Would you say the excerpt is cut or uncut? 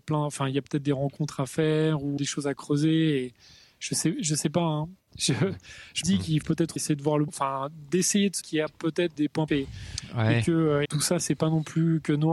cut